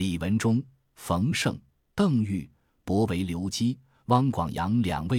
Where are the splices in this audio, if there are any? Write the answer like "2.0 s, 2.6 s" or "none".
none